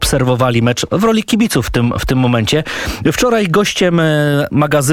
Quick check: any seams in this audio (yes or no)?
no